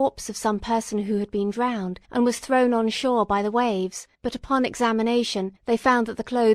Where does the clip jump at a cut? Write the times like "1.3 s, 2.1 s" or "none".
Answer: 2.0 s, 4.1 s, 5.6 s